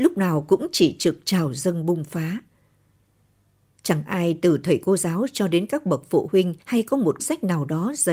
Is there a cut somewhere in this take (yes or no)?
yes